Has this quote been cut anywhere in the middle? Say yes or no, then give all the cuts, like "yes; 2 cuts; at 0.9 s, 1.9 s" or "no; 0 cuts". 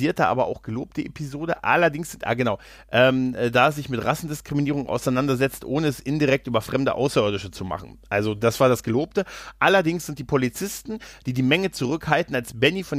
no; 0 cuts